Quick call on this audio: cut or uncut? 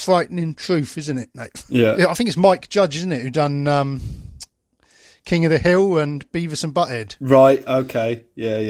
uncut